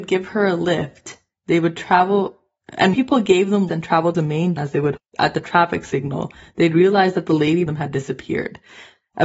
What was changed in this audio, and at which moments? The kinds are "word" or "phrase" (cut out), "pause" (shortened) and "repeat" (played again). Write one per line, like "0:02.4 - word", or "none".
0:02.9 - word
0:03.7 - word
0:04.1 - word
0:04.6 - word
0:05.0 - word
0:07.7 - word